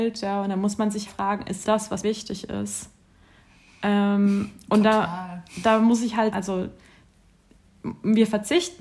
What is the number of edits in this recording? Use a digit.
4